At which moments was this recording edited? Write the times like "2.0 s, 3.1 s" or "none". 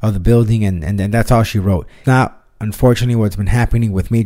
2.0 s